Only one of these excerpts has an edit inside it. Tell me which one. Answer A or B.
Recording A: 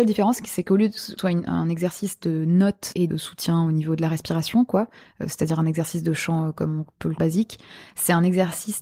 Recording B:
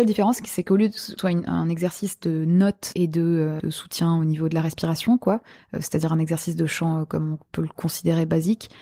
A